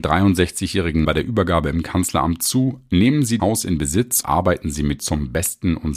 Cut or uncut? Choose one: cut